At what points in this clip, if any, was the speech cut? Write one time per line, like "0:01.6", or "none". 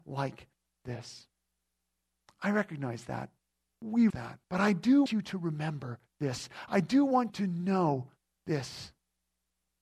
0:04.1
0:04.4
0:05.1
0:07.3